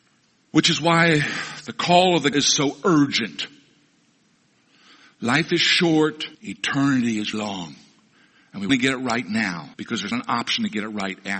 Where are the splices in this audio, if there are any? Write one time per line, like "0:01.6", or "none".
0:02.3
0:06.3
0:07.3
0:08.7
0:09.7
0:10.1